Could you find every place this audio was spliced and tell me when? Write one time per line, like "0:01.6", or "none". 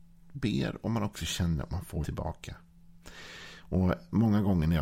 0:02.0